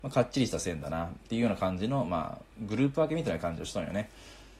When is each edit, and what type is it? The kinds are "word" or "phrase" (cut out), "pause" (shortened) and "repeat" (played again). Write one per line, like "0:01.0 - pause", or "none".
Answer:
0:02.5 - pause